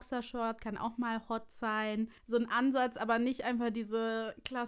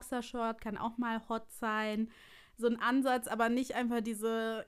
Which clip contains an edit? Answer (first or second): first